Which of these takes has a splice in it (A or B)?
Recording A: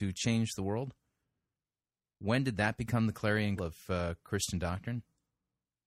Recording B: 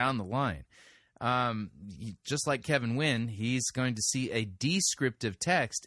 A